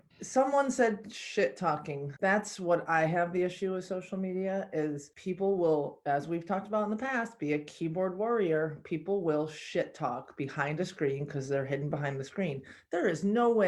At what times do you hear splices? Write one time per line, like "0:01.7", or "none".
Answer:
none